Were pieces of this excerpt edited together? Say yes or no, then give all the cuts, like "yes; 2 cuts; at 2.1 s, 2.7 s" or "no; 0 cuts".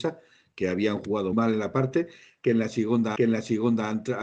yes; 3 cuts; at 1.3 s, 1.7 s, 3.2 s